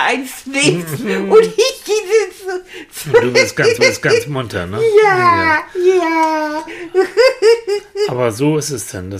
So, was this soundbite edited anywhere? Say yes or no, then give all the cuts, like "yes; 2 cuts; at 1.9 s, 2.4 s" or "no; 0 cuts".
yes; 1 cut; at 3.8 s